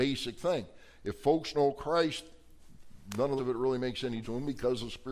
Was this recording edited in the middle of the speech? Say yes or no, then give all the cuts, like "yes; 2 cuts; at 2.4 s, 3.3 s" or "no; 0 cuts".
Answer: yes; 3 cuts; at 1.5 s, 3.4 s, 4.2 s